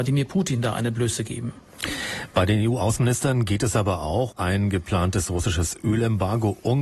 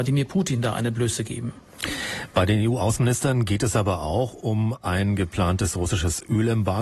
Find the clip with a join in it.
first; 1 cut; at 4.3 s

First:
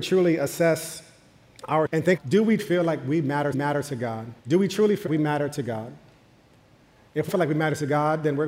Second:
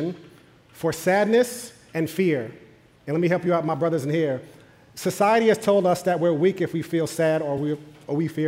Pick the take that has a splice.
first; 7 cuts; at 1.9 s, 2.2 s, 2.6 s, 3.5 s, 4.4 s, 5.1 s, 7.3 s

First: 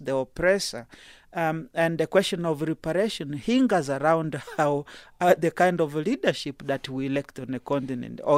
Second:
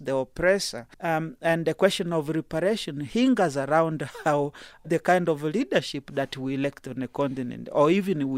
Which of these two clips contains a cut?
second; 2 cuts; at 0.9 s, 4.8 s

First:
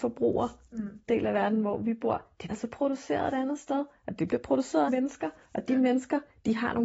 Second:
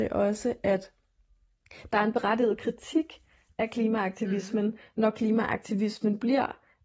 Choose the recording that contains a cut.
first; 3 cuts; at 1.1 s, 2.5 s, 4.9 s

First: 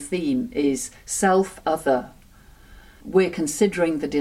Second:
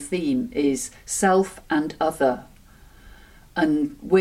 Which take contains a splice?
first; 2 cuts; at 1.6 s, 3.0 s

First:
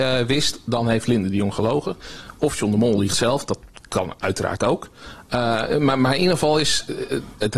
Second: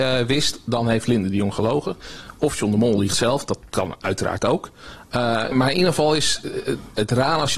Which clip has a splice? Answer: second; 2 cuts; at 3.7 s, 5.5 s

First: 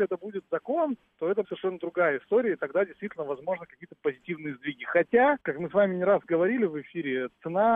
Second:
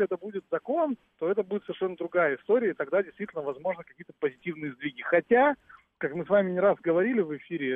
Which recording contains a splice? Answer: first; 2 cuts; at 1.4 s, 5.4 s

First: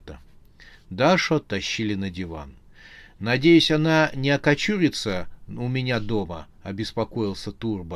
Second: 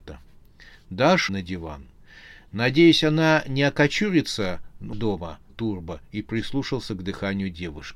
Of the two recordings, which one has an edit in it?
second; 3 cuts; at 1.3 s, 4.9 s, 5.5 s

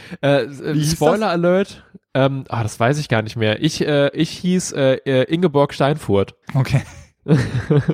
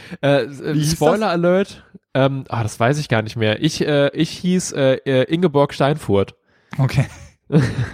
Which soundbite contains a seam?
first; 1 cut; at 6.4 s

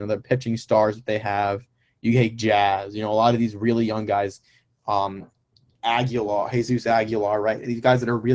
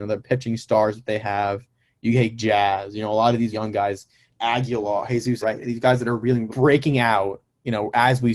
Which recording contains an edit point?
second; 4 cuts; at 3.5 s, 4.3 s, 5.4 s, 6.5 s

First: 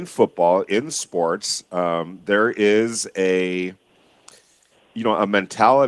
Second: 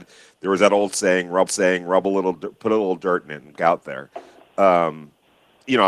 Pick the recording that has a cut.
second; 2 cuts; at 1.5 s, 3.6 s

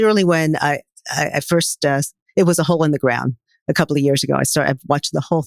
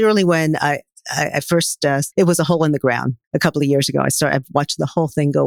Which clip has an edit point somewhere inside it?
second; 2 cuts; at 2.1 s, 3.2 s

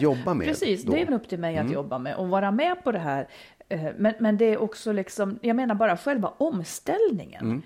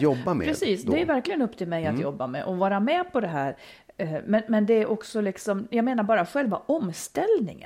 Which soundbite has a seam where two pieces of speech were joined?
first; 1 cut; at 1.1 s

